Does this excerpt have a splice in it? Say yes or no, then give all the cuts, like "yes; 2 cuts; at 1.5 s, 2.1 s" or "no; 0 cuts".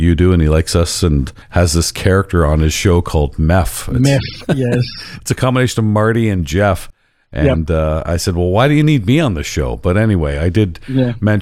yes; 1 cut; at 1.4 s